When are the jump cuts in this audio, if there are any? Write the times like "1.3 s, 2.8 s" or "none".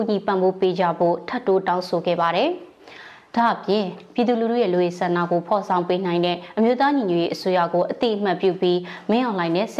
none